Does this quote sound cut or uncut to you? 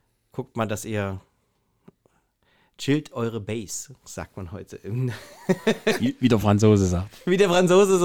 uncut